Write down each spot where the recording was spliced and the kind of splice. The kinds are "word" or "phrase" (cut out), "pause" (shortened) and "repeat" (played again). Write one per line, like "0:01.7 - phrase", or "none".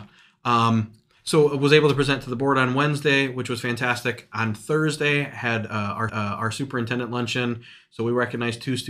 0:06.1 - repeat